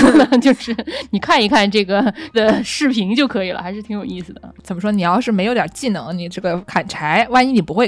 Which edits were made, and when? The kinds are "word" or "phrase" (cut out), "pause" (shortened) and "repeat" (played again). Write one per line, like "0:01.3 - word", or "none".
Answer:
0:02.3 - word